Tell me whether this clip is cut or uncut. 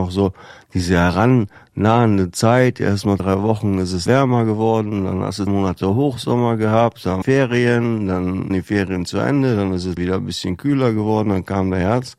cut